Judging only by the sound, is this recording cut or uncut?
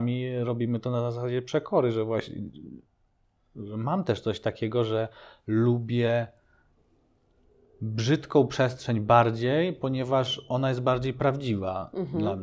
uncut